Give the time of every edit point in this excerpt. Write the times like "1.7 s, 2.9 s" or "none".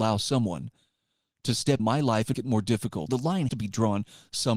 1.8 s, 2.3 s, 3.1 s, 3.5 s